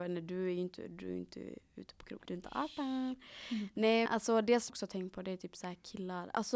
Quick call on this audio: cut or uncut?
cut